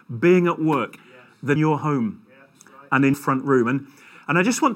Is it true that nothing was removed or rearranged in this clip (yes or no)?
no